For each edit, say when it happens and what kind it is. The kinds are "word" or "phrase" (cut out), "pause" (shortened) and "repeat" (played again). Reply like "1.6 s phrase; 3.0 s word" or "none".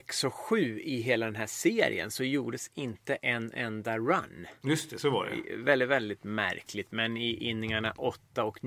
none